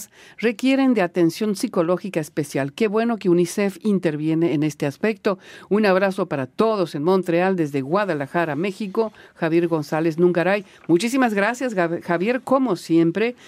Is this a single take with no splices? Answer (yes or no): yes